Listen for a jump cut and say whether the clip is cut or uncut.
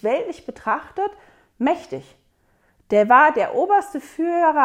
uncut